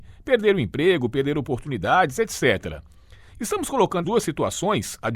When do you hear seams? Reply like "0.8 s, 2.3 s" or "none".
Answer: 4.0 s